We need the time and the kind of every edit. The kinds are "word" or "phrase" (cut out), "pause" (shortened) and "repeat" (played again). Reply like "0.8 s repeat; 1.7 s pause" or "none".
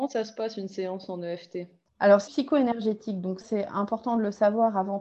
1.9 s pause; 2.3 s phrase; 3.4 s word